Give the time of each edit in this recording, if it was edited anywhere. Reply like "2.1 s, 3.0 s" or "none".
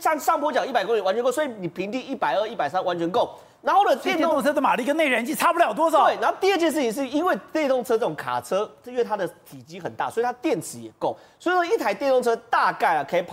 none